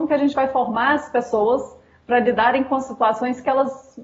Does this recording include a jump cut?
no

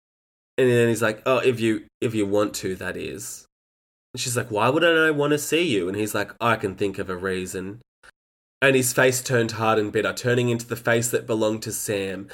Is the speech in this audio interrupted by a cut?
no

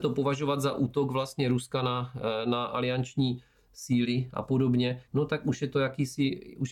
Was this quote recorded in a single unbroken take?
no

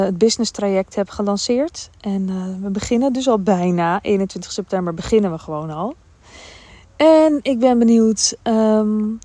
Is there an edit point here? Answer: no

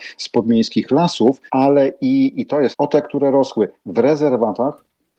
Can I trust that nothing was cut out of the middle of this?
no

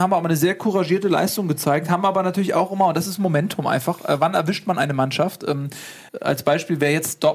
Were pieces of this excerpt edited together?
yes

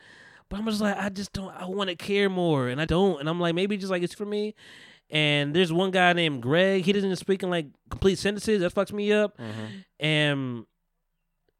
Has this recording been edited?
yes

